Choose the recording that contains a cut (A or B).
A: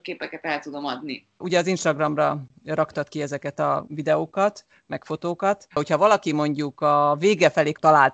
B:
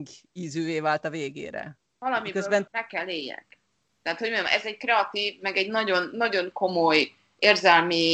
A